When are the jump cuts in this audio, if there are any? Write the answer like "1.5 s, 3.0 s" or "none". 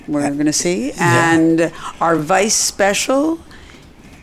none